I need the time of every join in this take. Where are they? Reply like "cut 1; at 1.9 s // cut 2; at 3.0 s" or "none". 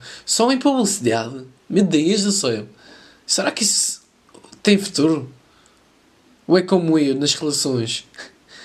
none